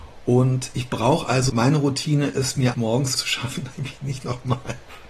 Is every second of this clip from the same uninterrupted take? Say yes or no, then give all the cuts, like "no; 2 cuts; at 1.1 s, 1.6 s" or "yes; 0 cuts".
no; 4 cuts; at 1.5 s, 2.7 s, 3.1 s, 3.7 s